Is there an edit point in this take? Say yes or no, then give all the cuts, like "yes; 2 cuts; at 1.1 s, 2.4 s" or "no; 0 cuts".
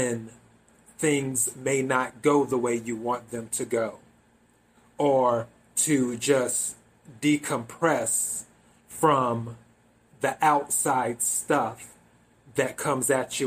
no; 0 cuts